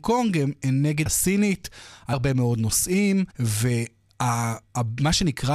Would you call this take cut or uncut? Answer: cut